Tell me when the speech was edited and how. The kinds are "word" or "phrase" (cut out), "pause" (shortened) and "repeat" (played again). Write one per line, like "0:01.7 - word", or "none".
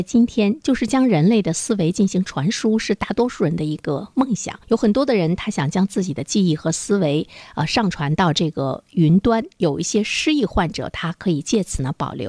0:04.6 - pause